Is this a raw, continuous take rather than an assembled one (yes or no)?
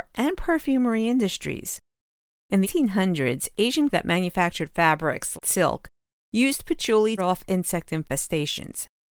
no